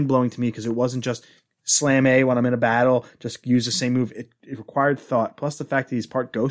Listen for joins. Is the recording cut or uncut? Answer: uncut